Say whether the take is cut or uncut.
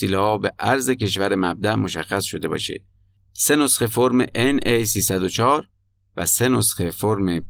uncut